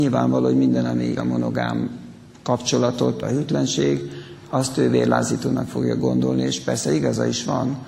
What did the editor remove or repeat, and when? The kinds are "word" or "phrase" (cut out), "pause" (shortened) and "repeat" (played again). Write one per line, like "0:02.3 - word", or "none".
0:01.2 - word
0:03.2 - word